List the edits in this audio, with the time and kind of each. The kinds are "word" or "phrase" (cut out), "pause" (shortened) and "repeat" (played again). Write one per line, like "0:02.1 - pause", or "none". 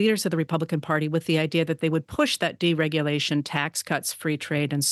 none